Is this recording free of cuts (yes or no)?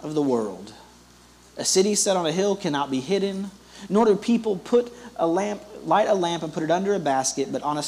yes